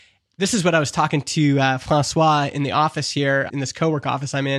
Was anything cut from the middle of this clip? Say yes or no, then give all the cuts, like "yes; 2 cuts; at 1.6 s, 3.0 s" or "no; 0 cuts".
yes; 1 cut; at 3.5 s